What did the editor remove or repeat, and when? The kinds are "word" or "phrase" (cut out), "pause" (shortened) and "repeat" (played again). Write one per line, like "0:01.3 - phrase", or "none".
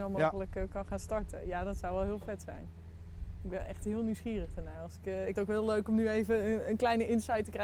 0:05.3 - word